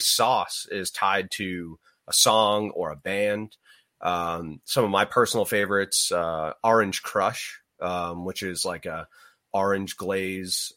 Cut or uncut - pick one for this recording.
uncut